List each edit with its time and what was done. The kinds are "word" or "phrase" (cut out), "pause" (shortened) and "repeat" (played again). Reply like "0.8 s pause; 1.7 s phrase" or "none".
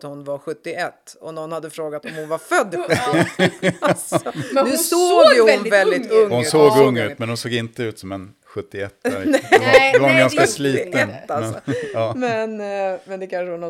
none